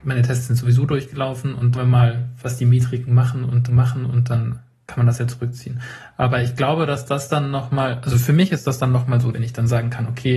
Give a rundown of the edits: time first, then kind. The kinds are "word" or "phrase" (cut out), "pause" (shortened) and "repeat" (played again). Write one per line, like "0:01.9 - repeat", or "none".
0:01.7 - phrase
0:03.7 - repeat
0:09.3 - phrase